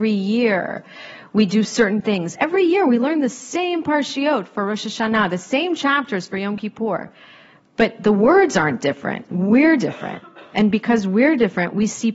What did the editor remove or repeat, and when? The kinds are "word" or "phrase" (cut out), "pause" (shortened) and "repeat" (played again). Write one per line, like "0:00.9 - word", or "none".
none